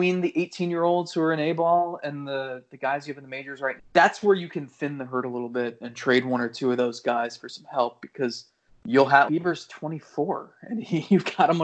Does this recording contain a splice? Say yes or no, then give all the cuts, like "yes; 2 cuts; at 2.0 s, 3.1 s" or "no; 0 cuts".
yes; 4 cuts; at 3.8 s, 5.8 s, 8.7 s, 9.3 s